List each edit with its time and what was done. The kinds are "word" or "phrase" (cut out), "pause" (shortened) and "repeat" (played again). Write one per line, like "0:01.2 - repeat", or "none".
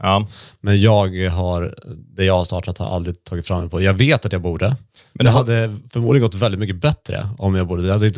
none

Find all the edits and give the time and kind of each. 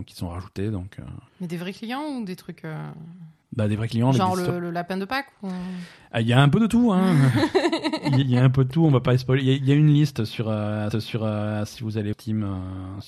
0:01.3 - pause
0:03.4 - pause
0:08.2 - phrase
0:10.9 - repeat
0:12.1 - phrase

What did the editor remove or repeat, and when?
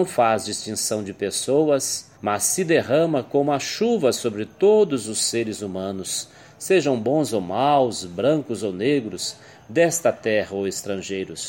0:02.1 - pause

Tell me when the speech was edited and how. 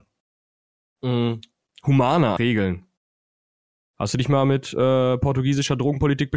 0:02.4 - word

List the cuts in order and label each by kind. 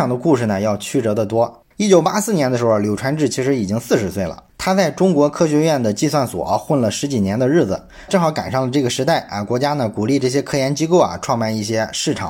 0:01.7 - pause
0:04.5 - pause
0:08.1 - phrase

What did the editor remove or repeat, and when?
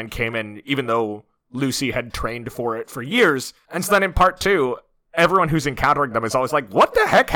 none

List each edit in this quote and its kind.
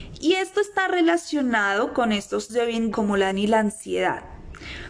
0:02.5 - word
0:02.9 - word
0:03.3 - word

